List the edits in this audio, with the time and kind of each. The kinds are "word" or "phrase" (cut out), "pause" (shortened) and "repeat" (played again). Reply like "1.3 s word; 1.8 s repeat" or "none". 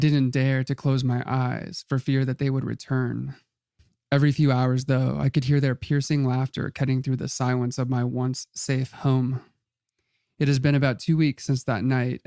none